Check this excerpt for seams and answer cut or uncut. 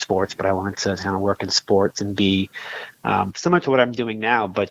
uncut